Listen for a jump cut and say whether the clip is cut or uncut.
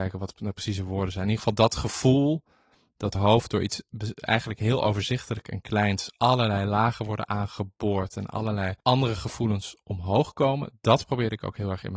cut